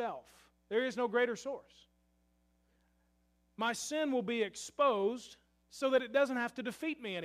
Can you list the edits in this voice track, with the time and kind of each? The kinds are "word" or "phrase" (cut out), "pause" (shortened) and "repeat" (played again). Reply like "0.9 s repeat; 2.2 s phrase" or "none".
none